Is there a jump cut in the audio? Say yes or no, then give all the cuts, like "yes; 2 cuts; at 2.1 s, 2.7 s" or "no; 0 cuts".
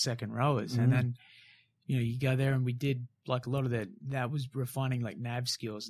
no; 0 cuts